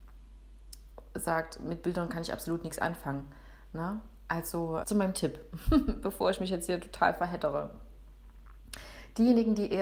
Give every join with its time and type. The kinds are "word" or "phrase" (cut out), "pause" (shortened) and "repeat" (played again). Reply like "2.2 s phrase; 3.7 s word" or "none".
4.8 s word